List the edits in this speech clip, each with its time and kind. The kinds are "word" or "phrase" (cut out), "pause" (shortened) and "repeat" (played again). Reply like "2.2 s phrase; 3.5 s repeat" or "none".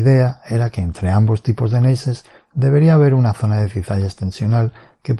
none